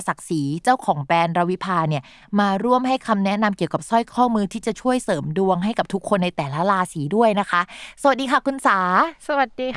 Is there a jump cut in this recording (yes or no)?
no